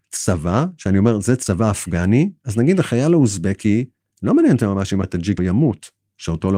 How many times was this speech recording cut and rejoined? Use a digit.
2